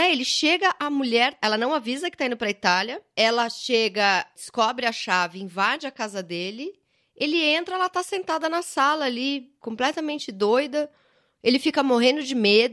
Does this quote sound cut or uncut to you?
uncut